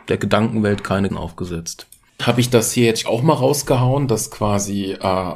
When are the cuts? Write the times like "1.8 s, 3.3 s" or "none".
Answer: 1.1 s, 2.2 s, 3.0 s